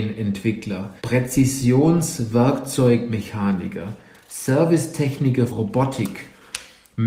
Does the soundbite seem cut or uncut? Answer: cut